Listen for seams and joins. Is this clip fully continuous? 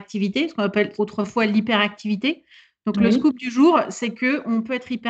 yes; 0 cuts

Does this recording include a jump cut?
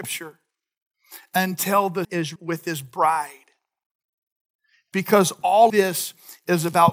yes; 3 cuts; at 2.0 s, 2.4 s, 5.7 s

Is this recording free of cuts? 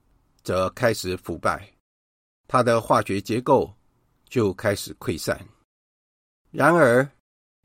yes; 0 cuts

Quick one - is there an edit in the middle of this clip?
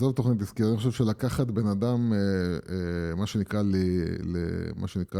no; 0 cuts

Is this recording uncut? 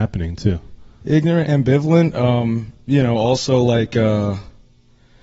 yes; 0 cuts

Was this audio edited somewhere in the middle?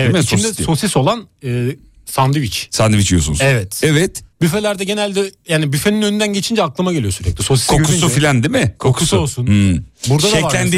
yes; 1 cut; at 4.3 s

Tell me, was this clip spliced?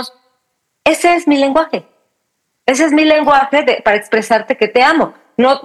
no; 0 cuts

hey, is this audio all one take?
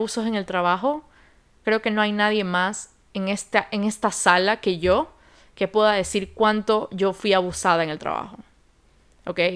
yes; 0 cuts

